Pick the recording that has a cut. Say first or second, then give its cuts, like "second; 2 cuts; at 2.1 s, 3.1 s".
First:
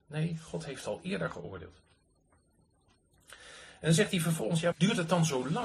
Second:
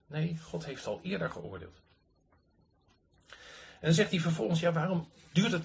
first; 1 cut; at 4.7 s